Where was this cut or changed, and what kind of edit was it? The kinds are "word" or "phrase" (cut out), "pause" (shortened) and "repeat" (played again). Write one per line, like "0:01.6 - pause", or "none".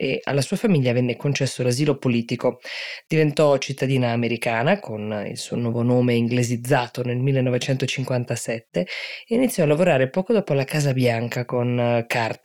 none